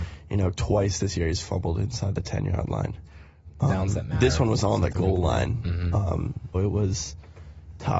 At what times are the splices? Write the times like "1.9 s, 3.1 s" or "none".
6.5 s